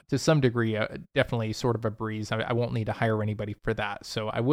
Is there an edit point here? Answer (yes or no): no